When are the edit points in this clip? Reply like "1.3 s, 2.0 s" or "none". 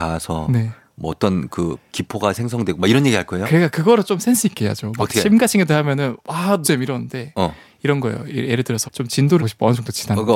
6.6 s, 8.8 s, 9.4 s